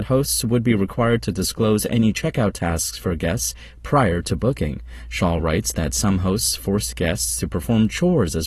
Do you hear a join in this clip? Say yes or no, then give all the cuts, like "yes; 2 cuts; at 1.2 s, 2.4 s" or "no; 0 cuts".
no; 0 cuts